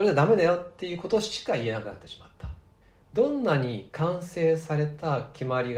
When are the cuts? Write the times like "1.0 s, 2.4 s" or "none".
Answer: 2.8 s